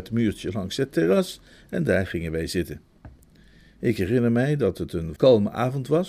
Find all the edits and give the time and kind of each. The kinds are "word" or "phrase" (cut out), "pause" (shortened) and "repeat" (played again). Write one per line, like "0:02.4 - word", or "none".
0:05.2 - word